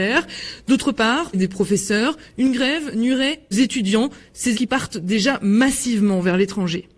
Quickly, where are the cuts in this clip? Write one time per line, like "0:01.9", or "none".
0:01.3
0:03.5
0:04.5